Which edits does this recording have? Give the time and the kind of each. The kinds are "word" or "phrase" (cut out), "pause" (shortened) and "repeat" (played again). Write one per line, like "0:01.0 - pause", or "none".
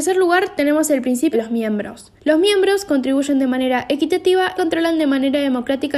0:01.3 - phrase
0:02.2 - pause
0:04.6 - word